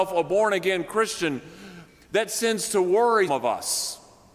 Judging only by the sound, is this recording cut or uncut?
cut